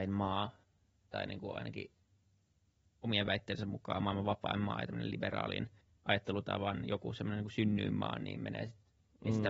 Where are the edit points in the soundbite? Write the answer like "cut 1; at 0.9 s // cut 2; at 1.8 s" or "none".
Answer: none